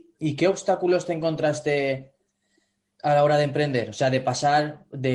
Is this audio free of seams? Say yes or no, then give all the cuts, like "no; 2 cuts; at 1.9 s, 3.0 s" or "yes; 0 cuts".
yes; 0 cuts